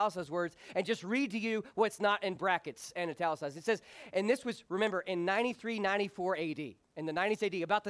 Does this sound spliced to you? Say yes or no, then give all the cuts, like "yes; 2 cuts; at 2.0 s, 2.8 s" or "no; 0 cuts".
no; 0 cuts